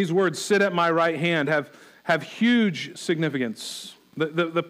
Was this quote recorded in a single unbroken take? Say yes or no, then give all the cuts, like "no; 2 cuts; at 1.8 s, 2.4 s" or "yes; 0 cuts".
yes; 0 cuts